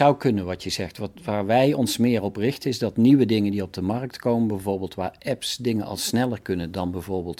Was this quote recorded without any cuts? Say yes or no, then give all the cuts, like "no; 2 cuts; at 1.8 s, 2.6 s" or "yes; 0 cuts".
yes; 0 cuts